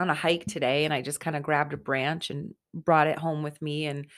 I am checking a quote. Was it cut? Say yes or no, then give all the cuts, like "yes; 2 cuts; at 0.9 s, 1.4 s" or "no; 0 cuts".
no; 0 cuts